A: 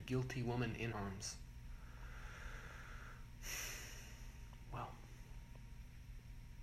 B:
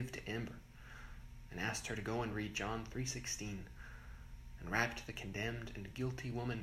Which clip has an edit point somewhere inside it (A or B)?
A